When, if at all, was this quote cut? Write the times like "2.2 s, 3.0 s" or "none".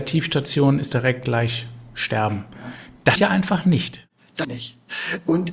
0.9 s, 3.2 s, 4.4 s